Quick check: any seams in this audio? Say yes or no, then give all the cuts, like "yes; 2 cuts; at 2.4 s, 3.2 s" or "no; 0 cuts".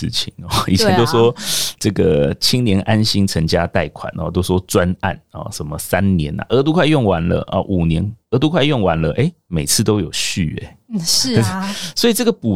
no; 0 cuts